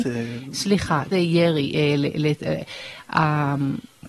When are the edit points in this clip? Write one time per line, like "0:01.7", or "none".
0:01.1